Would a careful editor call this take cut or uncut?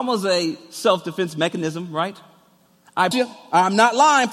cut